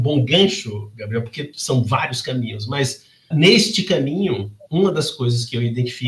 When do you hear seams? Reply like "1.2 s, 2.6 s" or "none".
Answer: 3.3 s